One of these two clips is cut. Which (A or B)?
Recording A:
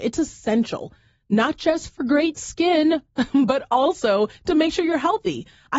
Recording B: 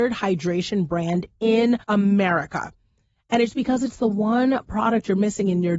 B